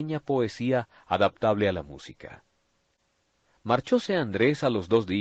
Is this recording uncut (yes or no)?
yes